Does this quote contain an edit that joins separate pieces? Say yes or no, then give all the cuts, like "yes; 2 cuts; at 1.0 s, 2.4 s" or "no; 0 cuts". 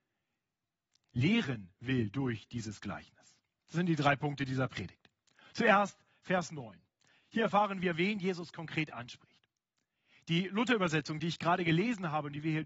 no; 0 cuts